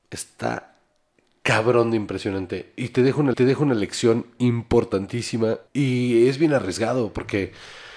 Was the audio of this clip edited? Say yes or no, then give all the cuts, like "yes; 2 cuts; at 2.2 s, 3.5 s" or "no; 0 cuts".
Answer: yes; 2 cuts; at 3.3 s, 5.7 s